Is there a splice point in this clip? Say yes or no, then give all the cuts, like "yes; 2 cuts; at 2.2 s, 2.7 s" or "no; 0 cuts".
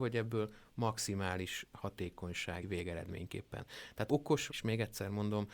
yes; 3 cuts; at 2.6 s, 4.1 s, 4.5 s